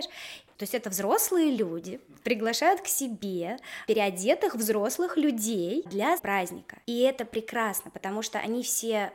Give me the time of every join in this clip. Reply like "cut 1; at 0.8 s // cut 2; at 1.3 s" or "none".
cut 1; at 2.2 s // cut 2; at 6.2 s